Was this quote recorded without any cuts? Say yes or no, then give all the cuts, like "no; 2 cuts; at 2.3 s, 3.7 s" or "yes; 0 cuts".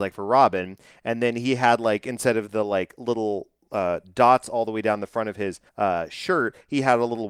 no; 1 cut; at 5.7 s